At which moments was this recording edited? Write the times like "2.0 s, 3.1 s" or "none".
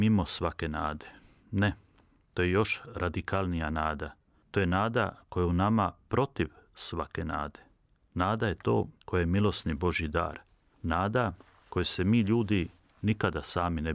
none